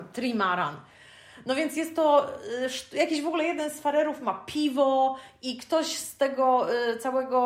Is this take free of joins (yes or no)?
yes